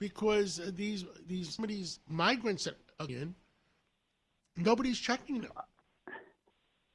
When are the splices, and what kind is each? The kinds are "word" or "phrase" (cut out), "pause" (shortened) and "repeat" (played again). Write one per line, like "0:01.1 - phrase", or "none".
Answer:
0:01.6 - word
0:03.1 - word